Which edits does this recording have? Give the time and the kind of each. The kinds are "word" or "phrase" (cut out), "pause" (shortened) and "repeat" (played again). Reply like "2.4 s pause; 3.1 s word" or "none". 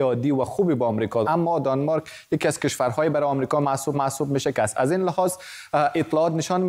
1.2 s word; 3.9 s repeat; 4.5 s phrase